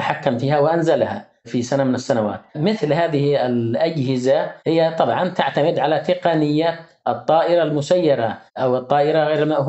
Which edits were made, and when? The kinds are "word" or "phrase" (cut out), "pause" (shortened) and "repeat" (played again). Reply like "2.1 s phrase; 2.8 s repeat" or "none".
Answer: 2.5 s pause; 4.6 s pause; 8.5 s pause